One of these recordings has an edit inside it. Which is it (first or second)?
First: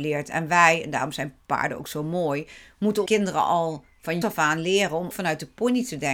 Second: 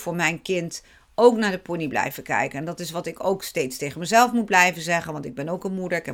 first